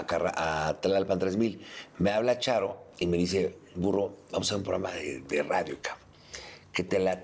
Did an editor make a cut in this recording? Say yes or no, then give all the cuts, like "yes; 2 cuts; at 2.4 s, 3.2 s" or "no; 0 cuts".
no; 0 cuts